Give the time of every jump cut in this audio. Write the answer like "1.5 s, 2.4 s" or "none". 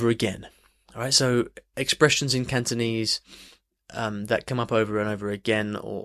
none